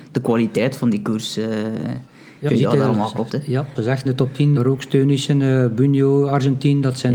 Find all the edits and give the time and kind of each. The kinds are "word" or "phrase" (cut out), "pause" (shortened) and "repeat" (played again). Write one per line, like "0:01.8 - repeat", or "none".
0:02.5 - word
0:03.3 - word
0:03.8 - word
0:04.1 - word
0:04.6 - word